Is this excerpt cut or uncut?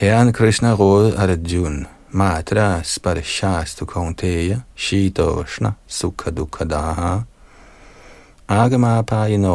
cut